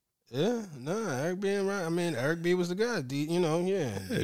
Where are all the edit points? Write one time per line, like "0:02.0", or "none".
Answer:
none